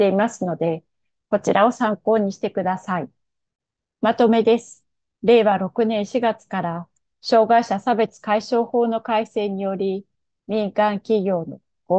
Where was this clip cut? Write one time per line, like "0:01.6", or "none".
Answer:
none